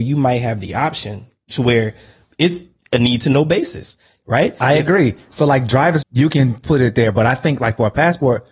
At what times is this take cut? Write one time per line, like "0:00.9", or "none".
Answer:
0:06.0